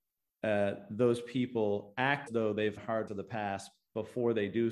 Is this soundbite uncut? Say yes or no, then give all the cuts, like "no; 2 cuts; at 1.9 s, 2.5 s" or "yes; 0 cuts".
no; 3 cuts; at 2.3 s, 2.8 s, 3.1 s